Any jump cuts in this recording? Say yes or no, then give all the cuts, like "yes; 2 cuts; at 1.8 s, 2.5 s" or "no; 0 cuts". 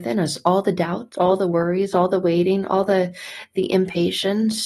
no; 0 cuts